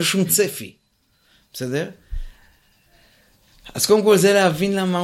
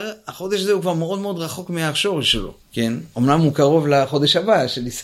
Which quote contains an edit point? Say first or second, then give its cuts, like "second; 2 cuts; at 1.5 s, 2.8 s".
second; 1 cut; at 2.6 s